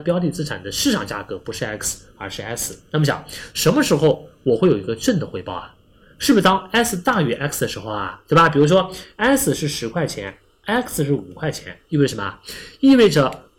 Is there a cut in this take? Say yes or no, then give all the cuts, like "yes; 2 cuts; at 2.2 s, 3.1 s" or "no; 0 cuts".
no; 0 cuts